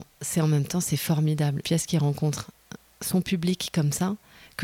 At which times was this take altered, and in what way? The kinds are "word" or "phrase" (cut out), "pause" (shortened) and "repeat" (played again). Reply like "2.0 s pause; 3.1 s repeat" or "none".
1.6 s word